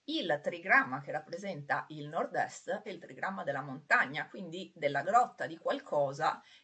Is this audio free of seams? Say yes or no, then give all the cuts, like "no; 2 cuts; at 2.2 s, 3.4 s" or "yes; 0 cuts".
no; 1 cut; at 2.8 s